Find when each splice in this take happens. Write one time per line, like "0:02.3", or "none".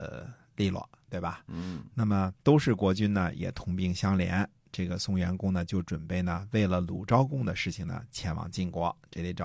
0:02.4